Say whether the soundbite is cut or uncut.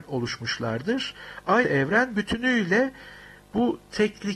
cut